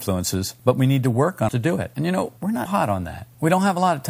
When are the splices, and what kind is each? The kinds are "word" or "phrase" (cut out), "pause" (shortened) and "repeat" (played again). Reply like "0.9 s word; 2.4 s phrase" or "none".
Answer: 1.5 s word; 2.7 s word